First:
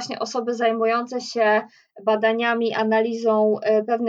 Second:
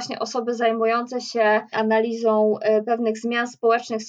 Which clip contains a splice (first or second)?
second